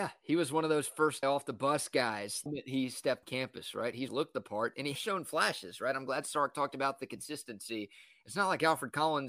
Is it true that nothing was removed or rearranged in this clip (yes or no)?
no